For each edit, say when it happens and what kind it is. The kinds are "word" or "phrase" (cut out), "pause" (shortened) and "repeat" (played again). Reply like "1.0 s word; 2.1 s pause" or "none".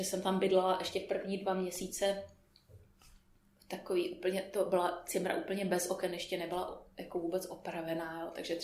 none